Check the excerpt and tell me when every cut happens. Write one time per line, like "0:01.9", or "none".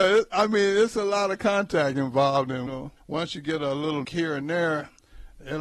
0:02.7
0:03.0
0:04.0